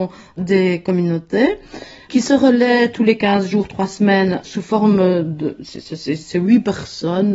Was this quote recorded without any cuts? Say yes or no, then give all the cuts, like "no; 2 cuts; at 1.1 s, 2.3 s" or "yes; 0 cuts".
yes; 0 cuts